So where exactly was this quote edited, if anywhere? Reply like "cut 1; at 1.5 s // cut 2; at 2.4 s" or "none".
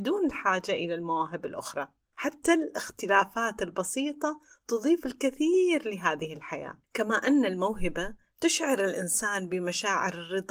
none